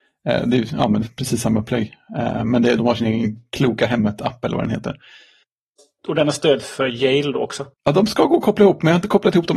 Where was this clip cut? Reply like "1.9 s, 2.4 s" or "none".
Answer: 1.0 s, 2.8 s, 7.7 s